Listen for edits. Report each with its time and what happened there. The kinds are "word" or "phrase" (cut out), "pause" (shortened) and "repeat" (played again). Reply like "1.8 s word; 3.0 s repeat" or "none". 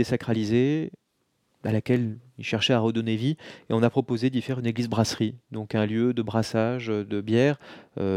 none